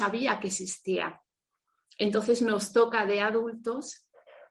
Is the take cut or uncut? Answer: uncut